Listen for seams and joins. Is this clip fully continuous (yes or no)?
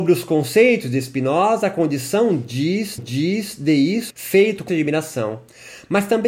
no